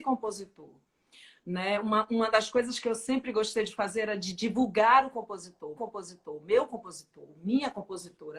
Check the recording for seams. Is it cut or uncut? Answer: cut